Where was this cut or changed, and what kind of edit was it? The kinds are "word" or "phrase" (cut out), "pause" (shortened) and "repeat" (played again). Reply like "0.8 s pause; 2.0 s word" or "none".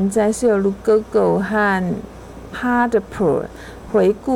2.5 s word